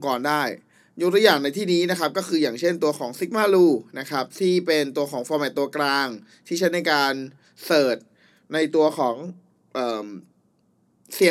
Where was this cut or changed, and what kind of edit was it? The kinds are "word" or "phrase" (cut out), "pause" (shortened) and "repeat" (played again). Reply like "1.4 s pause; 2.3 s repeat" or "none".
none